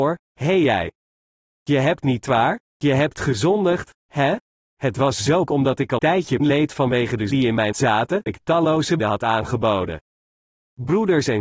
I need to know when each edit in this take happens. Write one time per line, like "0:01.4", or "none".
0:02.0
0:05.5
0:06.0
0:06.4
0:07.3
0:07.7
0:08.3
0:09.0

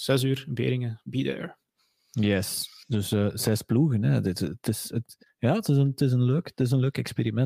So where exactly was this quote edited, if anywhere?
none

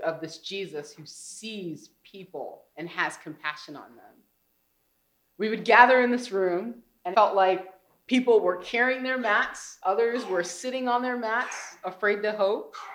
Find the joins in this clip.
0:02.7
0:07.1

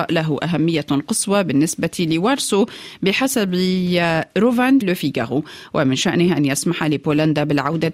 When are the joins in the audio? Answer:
0:04.8

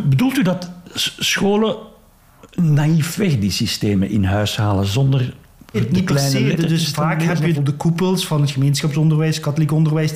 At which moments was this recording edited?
0:05.7
0:07.5

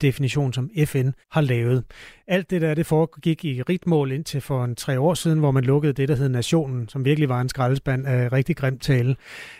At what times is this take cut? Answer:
0:01.2

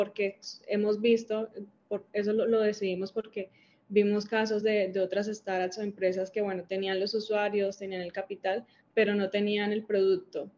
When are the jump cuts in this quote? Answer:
none

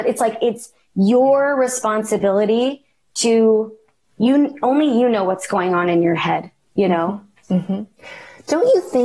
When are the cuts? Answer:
none

